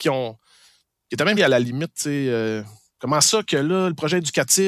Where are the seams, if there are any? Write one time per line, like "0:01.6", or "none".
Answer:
0:01.4